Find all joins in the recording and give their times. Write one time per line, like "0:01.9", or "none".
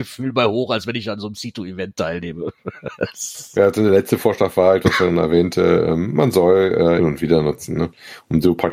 0:04.8
0:07.0